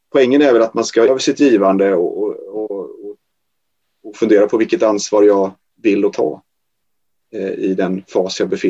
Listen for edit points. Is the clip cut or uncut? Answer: cut